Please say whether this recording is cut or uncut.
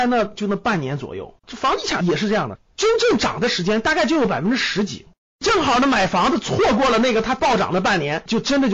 cut